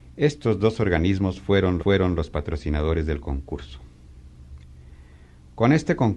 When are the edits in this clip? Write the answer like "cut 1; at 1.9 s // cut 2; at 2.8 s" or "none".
cut 1; at 1.8 s